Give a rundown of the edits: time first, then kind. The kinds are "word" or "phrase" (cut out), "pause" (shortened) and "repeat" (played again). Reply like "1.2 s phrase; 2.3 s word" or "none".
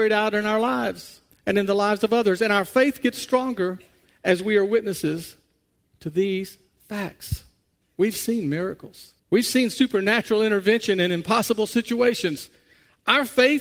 1.3 s pause; 5.8 s pause; 7.8 s pause; 9.2 s pause

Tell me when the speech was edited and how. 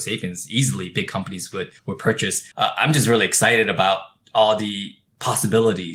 1.8 s pause; 2.5 s pause

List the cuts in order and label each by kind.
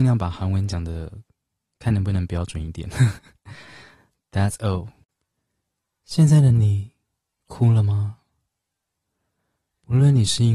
none

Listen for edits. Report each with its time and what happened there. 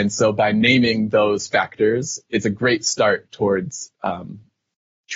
none

